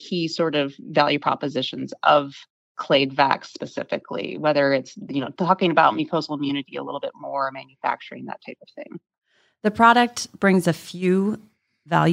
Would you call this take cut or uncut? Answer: uncut